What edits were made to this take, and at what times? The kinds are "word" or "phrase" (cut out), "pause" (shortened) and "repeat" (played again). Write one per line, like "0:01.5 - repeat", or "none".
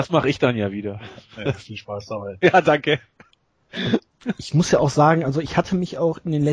none